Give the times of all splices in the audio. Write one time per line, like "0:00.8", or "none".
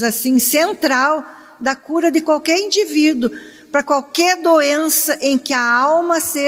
none